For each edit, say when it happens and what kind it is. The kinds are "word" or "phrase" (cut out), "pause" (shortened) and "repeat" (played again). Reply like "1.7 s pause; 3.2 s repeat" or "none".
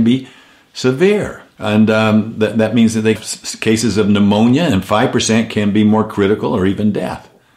1.5 s pause; 3.2 s word